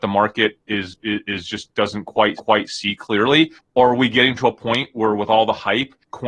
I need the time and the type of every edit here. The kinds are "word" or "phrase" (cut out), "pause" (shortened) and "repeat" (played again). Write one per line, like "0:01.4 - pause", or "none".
0:02.4 - repeat
0:03.7 - word